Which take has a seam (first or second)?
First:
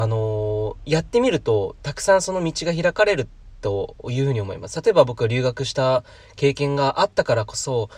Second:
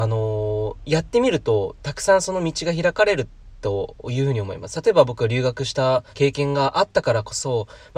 second